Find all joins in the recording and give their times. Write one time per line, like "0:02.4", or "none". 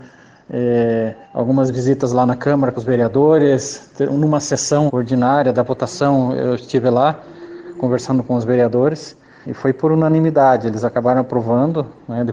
0:01.2
0:02.7
0:04.9
0:09.4